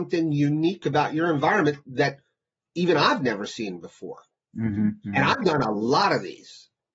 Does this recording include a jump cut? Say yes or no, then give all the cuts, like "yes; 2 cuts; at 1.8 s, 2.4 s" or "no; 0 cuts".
no; 0 cuts